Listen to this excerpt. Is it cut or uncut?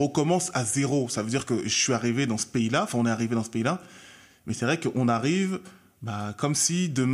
uncut